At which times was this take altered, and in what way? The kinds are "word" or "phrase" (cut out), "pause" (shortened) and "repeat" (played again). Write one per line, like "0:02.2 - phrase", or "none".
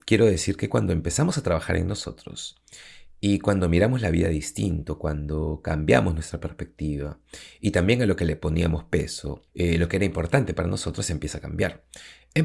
0:09.5 - pause